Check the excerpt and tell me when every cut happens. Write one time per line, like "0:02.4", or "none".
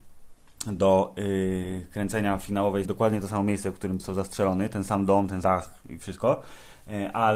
0:02.8
0:04.0
0:05.4